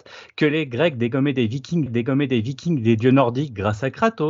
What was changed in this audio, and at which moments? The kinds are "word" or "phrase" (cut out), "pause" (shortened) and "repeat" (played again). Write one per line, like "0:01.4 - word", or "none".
0:01.9 - repeat